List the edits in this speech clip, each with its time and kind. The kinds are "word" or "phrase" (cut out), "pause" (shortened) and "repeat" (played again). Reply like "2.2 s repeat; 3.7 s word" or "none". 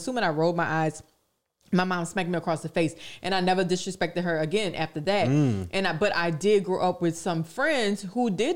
none